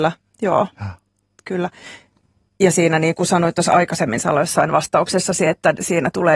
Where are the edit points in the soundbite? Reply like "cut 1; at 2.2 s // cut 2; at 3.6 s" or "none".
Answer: none